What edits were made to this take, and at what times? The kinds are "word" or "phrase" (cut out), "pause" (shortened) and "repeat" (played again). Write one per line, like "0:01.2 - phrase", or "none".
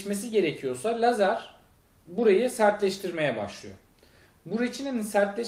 none